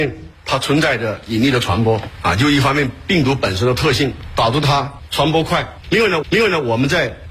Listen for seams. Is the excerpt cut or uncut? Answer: cut